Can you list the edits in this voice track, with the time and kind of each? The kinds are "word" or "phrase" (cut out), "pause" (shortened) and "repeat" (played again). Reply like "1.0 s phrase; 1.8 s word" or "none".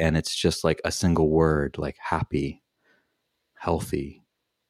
none

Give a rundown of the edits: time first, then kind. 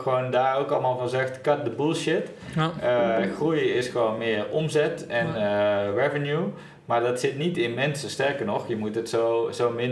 none

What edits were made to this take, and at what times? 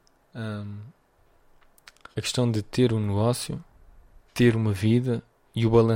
2.1 s pause; 4.3 s pause

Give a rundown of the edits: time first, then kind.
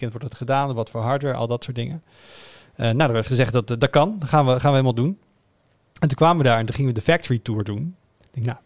none

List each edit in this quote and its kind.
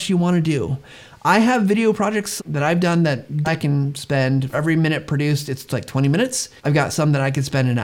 2.4 s word; 3.4 s word; 4.5 s word; 6.6 s pause

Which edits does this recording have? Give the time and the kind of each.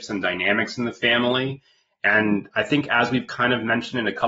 none

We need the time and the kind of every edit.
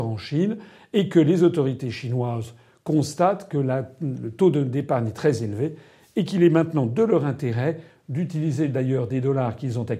none

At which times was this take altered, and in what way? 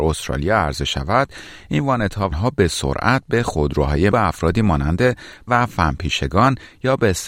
2.3 s word; 4.1 s word; 5.5 s word

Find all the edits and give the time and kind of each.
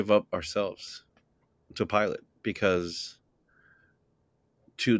1.4 s pause

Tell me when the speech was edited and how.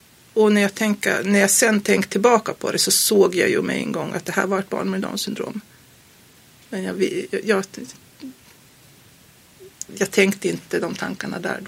9.9 s word

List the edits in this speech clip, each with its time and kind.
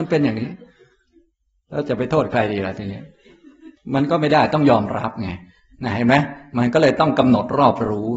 3.8 s pause

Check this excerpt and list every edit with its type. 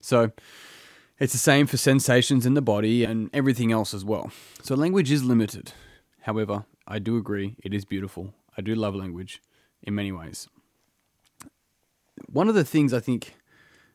3.1 s word

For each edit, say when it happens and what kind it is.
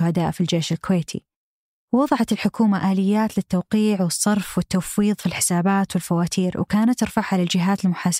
none

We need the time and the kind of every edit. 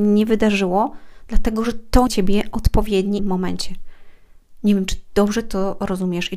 2.1 s phrase; 3.2 s phrase

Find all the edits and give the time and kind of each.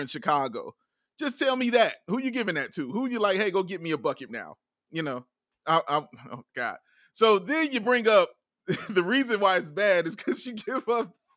4.3 s word

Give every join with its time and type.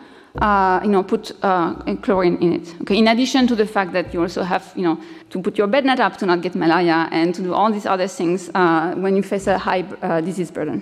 5.2 s pause

